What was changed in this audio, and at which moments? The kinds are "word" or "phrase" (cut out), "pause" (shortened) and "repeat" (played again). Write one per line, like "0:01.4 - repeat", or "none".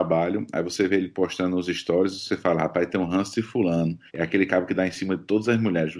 0:04.1 - pause